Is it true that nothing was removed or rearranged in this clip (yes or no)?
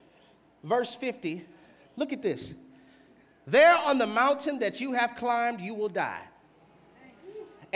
yes